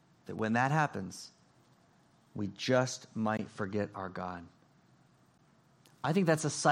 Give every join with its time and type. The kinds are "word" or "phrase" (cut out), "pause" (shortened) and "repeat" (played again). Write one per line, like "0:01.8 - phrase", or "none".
none